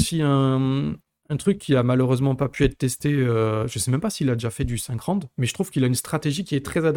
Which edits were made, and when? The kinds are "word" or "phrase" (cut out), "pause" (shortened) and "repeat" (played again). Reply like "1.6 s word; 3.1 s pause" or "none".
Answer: none